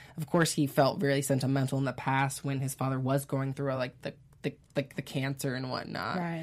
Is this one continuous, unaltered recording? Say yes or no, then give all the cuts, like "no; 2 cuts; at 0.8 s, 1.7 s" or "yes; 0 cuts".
yes; 0 cuts